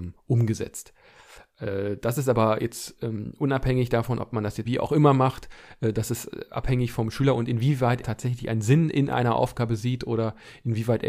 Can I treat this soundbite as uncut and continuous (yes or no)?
no